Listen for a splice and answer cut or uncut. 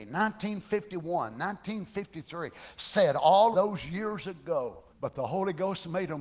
cut